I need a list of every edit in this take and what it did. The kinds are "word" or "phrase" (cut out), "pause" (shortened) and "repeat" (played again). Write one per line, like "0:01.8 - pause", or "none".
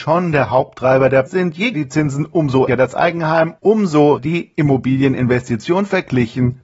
0:01.3 - word
0:01.7 - word
0:02.7 - word
0:04.2 - word